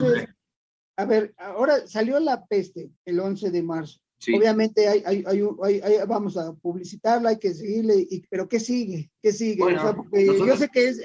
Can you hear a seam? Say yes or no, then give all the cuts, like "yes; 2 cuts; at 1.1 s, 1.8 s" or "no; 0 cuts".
yes; 3 cuts; at 3.0 s, 4.1 s, 9.1 s